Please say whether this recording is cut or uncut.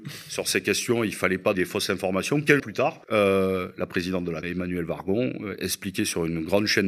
cut